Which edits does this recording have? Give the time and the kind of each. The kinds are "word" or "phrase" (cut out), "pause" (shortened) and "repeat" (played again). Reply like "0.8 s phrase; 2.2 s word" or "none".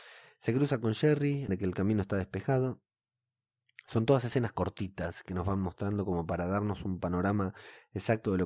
1.5 s word

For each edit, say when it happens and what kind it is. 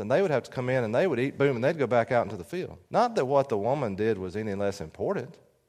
2.8 s pause

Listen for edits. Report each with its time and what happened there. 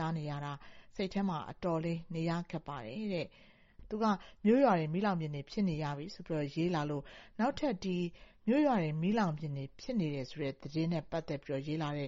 none

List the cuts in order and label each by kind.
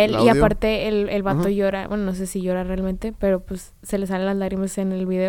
none

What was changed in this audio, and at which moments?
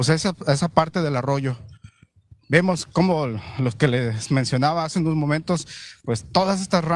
none

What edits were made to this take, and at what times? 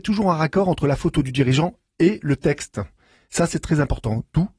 none

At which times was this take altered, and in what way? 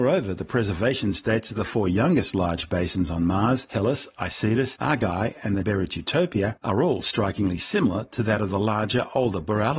5.6 s word

